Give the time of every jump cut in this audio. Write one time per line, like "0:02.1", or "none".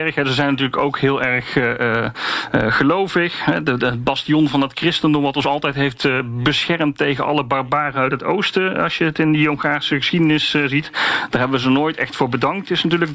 none